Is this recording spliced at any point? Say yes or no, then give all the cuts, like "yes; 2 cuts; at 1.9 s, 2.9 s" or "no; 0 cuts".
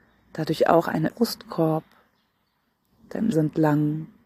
yes; 2 cuts; at 1.1 s, 3.3 s